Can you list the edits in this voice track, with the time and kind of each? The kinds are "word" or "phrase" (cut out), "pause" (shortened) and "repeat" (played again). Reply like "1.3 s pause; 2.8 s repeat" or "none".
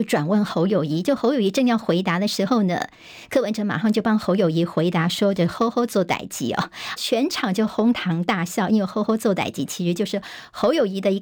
7.0 s word

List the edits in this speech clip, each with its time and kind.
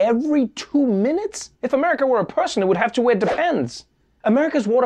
1.5 s pause

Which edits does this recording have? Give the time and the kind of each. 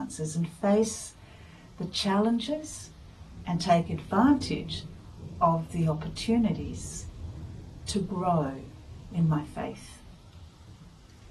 none

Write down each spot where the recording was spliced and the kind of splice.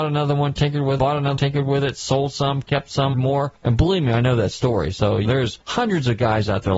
1.0 s word; 1.4 s word; 3.1 s word; 5.2 s word

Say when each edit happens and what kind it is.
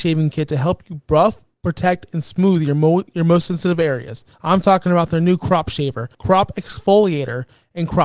4.3 s pause; 6.1 s pause

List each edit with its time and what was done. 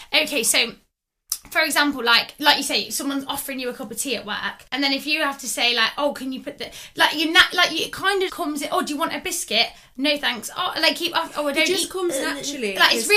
4.7 s pause; 8.3 s word

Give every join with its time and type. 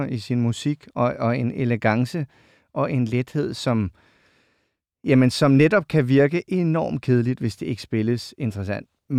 none

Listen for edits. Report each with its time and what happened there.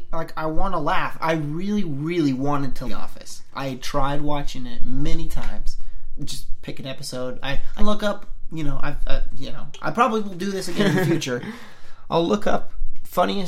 2.8 s word; 7.8 s word

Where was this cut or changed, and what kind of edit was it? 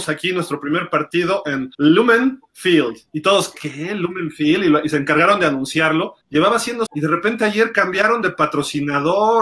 1.7 s pause; 6.2 s pause; 6.9 s phrase

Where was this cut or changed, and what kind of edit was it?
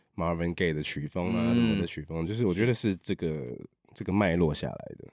none

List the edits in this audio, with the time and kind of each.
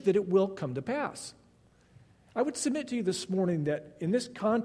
none

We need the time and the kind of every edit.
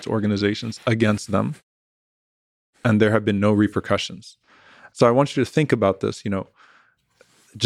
none

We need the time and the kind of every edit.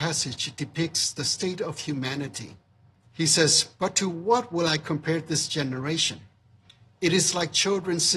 none

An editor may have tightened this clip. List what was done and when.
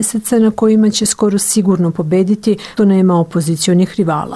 2.8 s word

